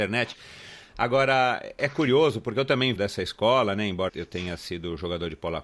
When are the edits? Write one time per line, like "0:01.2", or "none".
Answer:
0:01.8
0:03.0
0:04.1